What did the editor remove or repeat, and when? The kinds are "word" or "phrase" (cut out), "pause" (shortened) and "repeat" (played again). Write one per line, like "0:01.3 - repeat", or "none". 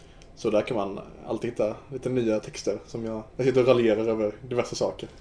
0:03.3 - pause